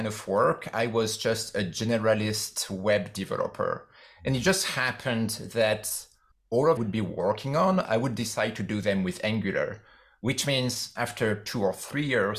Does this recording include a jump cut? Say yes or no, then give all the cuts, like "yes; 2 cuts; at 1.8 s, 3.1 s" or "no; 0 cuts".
yes; 1 cut; at 6.8 s